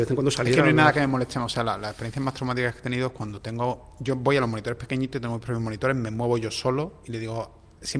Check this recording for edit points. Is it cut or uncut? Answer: uncut